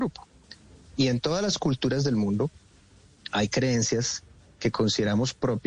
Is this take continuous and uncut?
yes; 0 cuts

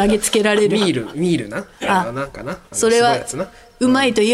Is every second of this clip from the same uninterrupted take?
no; 1 cut; at 2.7 s

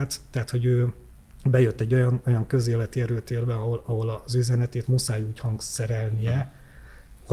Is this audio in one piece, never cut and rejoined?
yes; 0 cuts

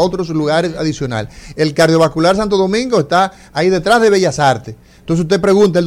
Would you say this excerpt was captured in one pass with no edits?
yes; 0 cuts

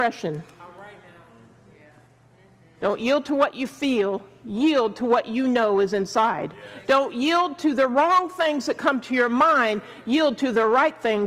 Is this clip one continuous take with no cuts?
yes; 0 cuts

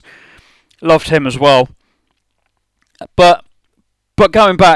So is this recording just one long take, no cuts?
yes; 0 cuts

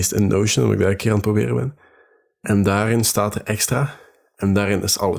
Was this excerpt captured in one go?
yes; 0 cuts

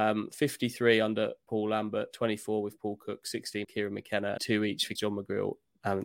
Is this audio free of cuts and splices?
no; 3 cuts; at 3.6 s, 4.4 s, 5.0 s

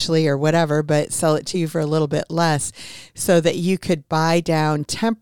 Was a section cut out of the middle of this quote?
no; 0 cuts

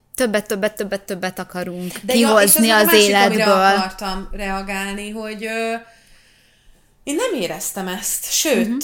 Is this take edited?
no; 0 cuts

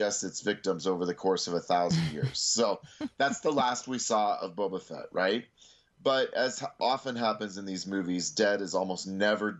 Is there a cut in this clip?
no; 0 cuts

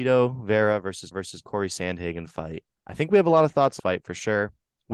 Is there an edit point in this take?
yes; 3 cuts; at 1.1 s, 2.7 s, 3.8 s

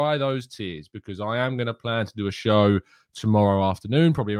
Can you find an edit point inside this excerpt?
no; 0 cuts

